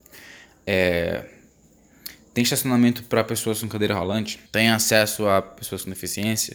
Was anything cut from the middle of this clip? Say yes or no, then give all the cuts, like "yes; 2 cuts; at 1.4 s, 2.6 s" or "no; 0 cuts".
yes; 1 cut; at 4.5 s